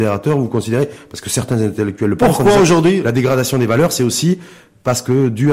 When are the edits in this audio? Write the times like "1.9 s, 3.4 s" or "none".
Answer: none